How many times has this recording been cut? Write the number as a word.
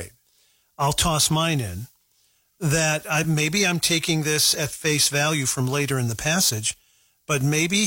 zero